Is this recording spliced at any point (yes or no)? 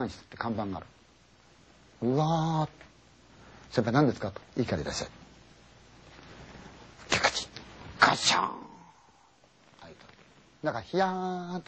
no